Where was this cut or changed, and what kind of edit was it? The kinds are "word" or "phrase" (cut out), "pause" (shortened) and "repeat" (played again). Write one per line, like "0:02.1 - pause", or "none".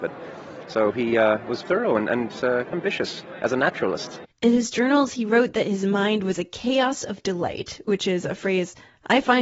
0:01.6 - word
0:02.7 - word
0:04.3 - pause